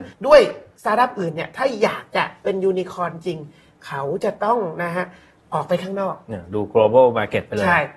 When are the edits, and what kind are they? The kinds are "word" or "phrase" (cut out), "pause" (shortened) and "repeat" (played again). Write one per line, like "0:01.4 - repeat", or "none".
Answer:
none